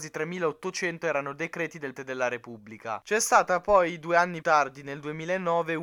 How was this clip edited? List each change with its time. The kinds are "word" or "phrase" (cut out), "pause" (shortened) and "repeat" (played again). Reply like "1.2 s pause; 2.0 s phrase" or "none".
2.0 s word; 4.4 s word